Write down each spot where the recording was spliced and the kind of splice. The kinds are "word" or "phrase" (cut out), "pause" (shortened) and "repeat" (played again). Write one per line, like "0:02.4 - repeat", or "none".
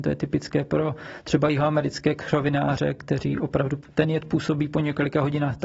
none

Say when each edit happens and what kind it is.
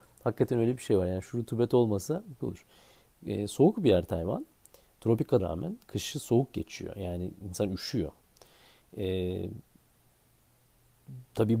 0:02.4 - phrase
0:05.4 - word

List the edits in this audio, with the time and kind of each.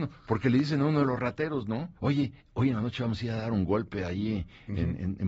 0:02.0 - pause

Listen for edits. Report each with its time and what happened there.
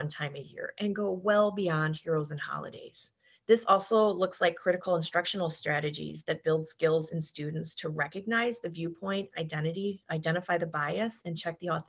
0:03.3 - pause

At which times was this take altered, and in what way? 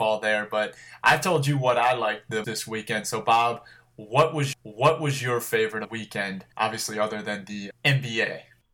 0:02.4 - word
0:04.5 - repeat
0:05.8 - phrase
0:06.5 - pause
0:07.7 - word

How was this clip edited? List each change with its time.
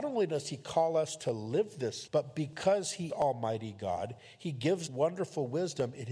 0:02.1 - word
0:03.1 - word
0:04.9 - phrase

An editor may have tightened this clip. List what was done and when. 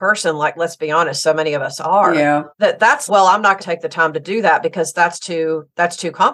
0:02.5 - pause
0:03.1 - word
0:03.6 - word

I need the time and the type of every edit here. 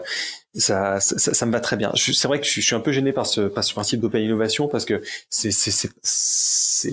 none

